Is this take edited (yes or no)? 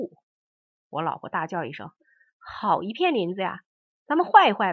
no